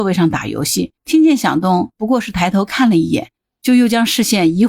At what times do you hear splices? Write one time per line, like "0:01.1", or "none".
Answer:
0:01.0